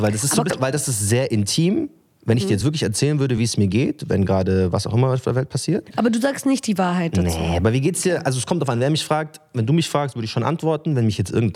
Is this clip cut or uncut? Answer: uncut